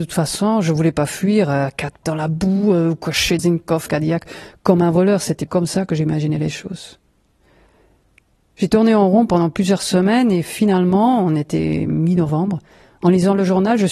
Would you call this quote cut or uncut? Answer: cut